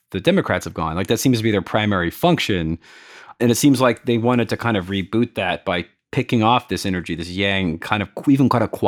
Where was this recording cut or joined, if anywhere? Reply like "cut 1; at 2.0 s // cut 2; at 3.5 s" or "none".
none